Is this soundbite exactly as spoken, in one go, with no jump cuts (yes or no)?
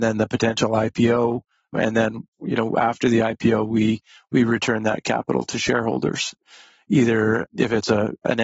yes